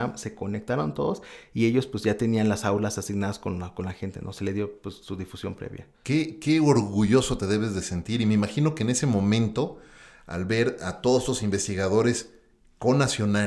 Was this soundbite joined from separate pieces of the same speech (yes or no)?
yes